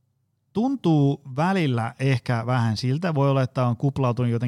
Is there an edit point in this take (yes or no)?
no